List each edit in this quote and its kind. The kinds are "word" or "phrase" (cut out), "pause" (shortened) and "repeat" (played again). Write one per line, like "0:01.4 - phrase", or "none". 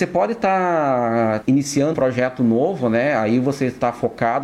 0:01.4 - word
0:01.9 - word